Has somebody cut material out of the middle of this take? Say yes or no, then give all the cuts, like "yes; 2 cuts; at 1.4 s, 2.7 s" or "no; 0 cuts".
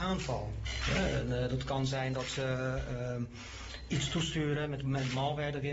no; 0 cuts